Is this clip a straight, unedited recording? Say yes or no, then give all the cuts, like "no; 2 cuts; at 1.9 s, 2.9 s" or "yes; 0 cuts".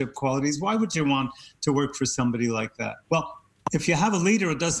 no; 1 cut; at 3.0 s